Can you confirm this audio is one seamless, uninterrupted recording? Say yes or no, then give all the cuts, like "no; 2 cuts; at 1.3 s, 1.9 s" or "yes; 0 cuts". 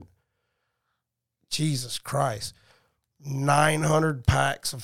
yes; 0 cuts